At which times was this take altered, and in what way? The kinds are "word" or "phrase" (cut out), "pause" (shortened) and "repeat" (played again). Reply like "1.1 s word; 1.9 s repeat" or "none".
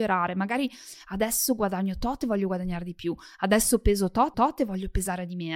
4.3 s repeat